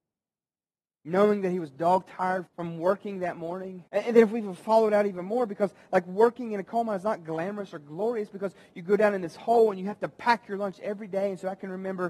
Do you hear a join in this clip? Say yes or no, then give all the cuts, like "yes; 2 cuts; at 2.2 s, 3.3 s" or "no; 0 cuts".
yes; 2 cuts; at 2.5 s, 3.9 s